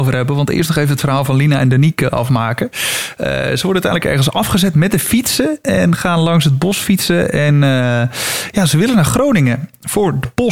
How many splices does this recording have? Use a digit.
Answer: 0